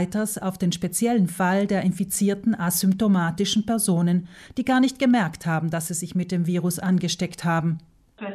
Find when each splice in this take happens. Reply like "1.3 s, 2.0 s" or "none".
none